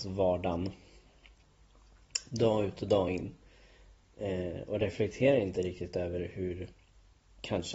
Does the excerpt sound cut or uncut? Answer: uncut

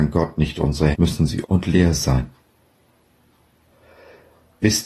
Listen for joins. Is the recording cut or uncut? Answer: cut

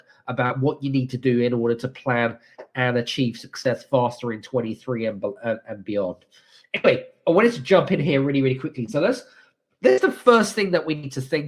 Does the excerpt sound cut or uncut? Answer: uncut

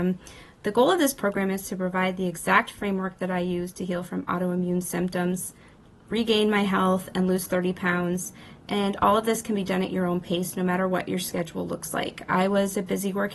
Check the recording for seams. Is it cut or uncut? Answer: uncut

